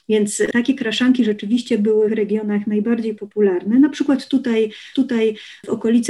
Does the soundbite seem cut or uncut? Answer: cut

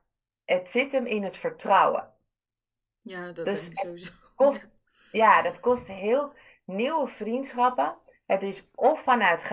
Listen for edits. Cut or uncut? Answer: uncut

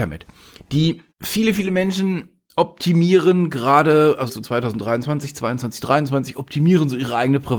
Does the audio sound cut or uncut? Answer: cut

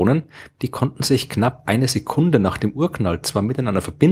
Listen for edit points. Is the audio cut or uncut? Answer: uncut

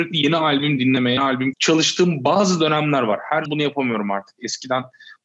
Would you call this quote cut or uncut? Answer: cut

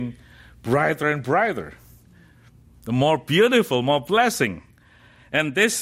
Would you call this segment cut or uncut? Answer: uncut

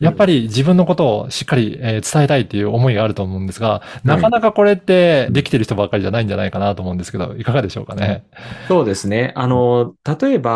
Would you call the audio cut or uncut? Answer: cut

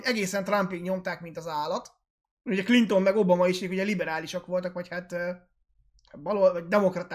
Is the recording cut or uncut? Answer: uncut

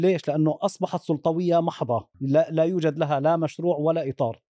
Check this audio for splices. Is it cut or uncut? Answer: cut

